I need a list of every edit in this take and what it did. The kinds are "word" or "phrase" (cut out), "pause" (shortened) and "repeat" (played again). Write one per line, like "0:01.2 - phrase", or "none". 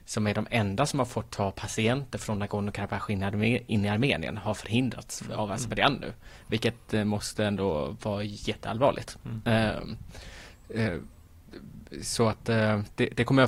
none

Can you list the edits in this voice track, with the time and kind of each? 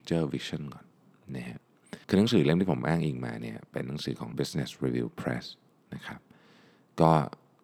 0:02.0 - pause
0:04.3 - word

